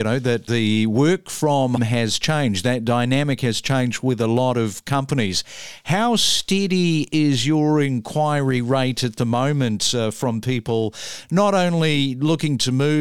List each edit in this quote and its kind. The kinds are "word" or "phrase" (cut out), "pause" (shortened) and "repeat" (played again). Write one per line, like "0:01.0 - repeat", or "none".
0:01.8 - word